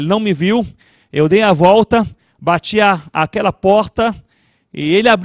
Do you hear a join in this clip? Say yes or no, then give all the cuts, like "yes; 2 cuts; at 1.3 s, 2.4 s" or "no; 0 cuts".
no; 0 cuts